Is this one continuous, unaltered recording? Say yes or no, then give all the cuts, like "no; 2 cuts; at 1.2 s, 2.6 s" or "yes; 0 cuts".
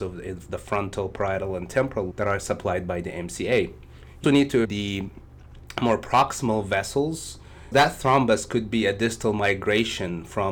no; 4 cuts; at 2.1 s, 4.2 s, 4.6 s, 7.7 s